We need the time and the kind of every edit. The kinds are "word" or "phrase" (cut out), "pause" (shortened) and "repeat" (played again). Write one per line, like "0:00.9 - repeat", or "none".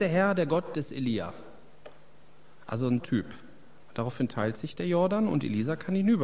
0:03.0 - phrase